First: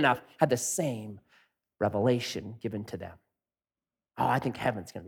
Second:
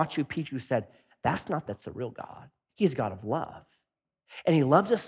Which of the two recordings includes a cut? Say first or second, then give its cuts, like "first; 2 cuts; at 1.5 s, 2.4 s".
second; 1 cut; at 1.7 s